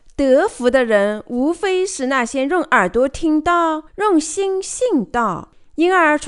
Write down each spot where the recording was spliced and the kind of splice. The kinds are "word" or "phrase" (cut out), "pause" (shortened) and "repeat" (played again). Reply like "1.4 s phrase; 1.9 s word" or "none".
3.9 s pause